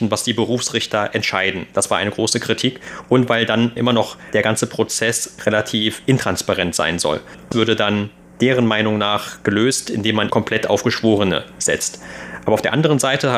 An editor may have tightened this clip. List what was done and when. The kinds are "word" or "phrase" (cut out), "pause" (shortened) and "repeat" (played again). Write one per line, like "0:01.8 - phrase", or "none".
0:03.8 - word
0:07.5 - word
0:10.3 - word